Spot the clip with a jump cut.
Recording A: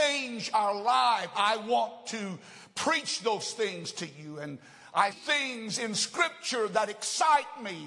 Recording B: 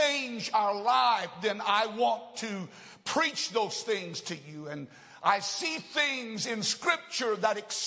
A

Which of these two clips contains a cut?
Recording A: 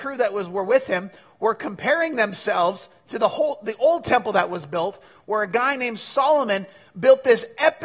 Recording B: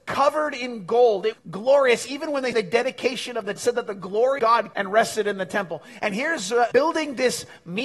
B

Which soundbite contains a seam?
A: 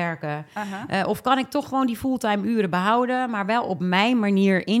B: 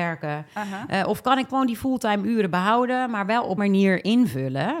B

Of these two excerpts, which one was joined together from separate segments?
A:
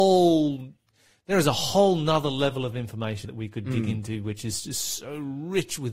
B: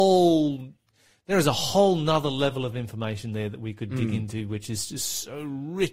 A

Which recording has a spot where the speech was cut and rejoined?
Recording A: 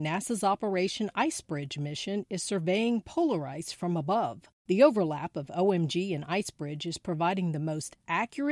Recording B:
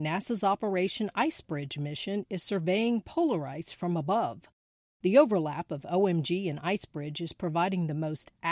A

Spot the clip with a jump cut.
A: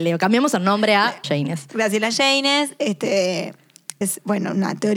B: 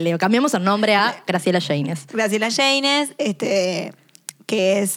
A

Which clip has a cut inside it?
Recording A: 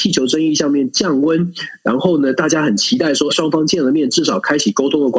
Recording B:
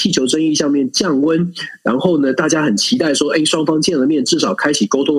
A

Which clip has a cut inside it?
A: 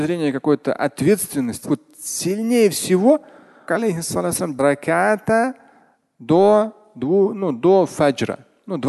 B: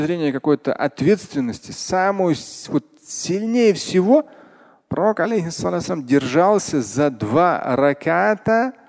A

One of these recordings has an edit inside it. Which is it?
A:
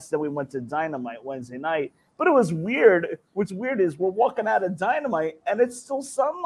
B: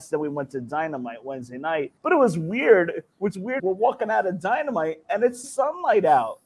B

